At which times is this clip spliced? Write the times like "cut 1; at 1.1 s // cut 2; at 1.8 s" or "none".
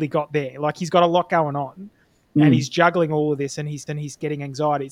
cut 1; at 3.9 s

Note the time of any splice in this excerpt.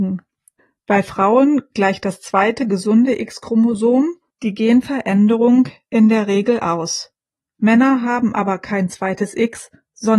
none

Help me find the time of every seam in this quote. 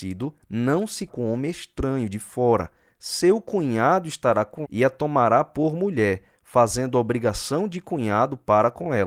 cut 1; at 1.1 s // cut 2; at 4.6 s

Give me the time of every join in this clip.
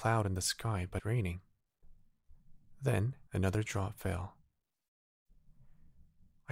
cut 1; at 1.0 s // cut 2; at 3.3 s

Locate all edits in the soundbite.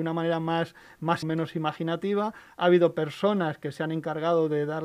cut 1; at 1.2 s

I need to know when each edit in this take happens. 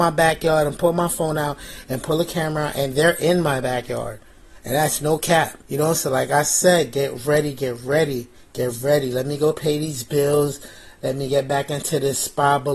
cut 1; at 5.6 s // cut 2; at 8.4 s

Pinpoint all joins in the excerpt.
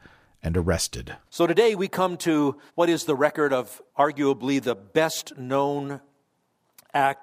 cut 1; at 1.3 s // cut 2; at 2.7 s // cut 3; at 3.9 s

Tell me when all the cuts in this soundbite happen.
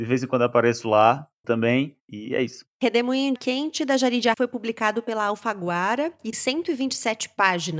cut 1; at 1.4 s // cut 2; at 3.4 s // cut 3; at 4.3 s // cut 4; at 6.3 s

